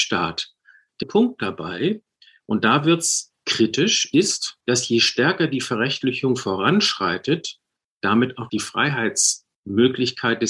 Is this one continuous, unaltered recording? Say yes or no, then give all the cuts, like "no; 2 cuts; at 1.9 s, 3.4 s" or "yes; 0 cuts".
no; 3 cuts; at 1.0 s, 4.6 s, 8.5 s